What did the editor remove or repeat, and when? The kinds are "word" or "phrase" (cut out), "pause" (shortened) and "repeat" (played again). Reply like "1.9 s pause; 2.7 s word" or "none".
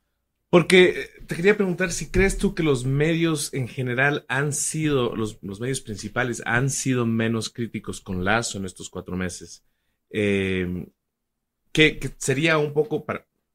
none